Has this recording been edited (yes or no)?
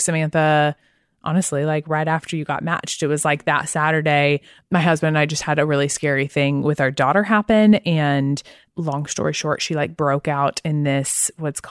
no